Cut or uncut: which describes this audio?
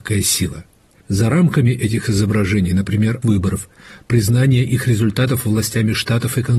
cut